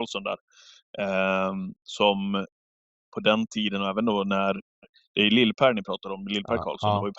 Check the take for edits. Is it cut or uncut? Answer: uncut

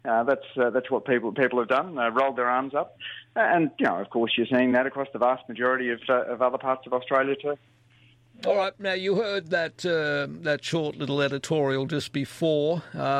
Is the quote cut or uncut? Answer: uncut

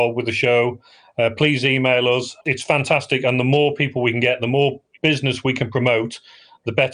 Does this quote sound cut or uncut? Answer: cut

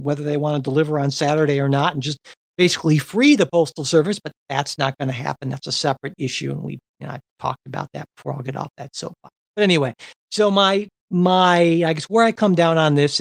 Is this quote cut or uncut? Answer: uncut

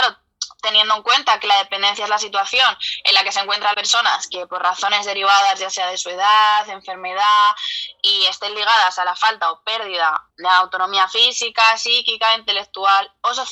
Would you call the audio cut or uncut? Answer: cut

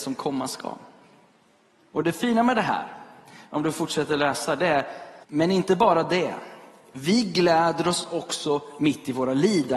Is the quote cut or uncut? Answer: cut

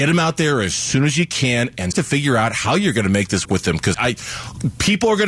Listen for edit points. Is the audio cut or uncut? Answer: cut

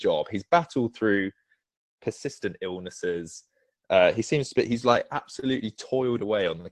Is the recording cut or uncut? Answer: uncut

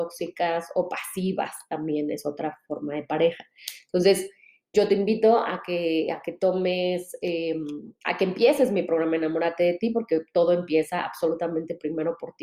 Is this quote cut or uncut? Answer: cut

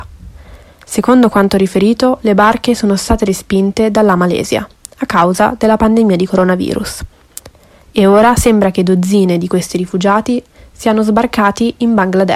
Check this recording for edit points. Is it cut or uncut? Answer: uncut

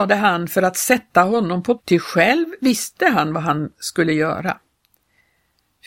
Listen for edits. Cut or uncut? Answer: cut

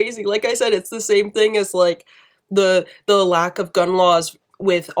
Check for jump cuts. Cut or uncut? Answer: uncut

